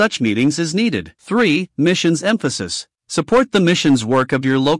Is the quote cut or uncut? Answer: cut